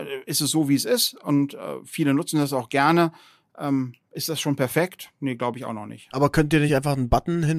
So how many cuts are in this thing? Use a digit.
0